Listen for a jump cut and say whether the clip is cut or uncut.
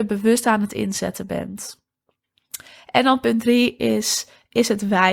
uncut